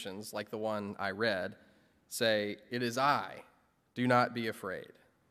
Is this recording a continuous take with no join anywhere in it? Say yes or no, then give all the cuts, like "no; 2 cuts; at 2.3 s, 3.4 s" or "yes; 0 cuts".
yes; 0 cuts